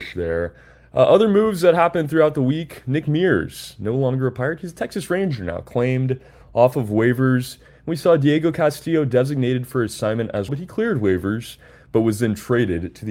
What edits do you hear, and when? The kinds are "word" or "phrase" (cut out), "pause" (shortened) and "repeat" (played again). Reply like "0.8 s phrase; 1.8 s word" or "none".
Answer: 10.5 s word

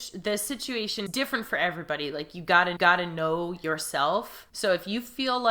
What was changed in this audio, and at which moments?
1.1 s phrase; 2.8 s repeat; 4.5 s pause

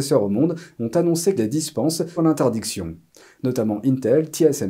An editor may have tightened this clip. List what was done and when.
1.4 s phrase; 2.2 s word

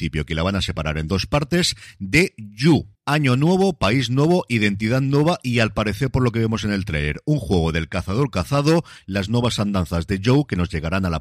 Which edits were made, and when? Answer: 3.0 s pause

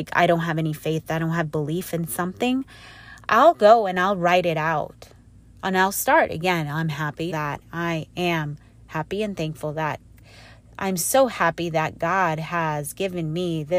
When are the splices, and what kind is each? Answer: 7.3 s phrase

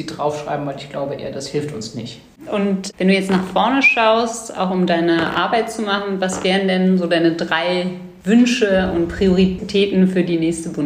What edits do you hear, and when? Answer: none

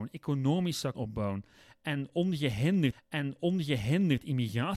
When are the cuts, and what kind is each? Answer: 0.9 s word; 2.9 s repeat

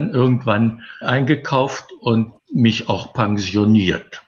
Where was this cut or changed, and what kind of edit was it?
1.0 s word; 2.4 s word

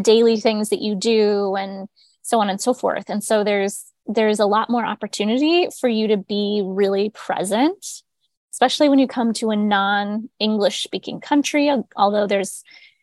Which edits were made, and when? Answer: none

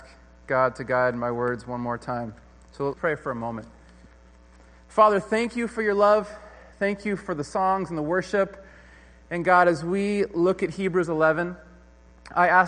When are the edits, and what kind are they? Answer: none

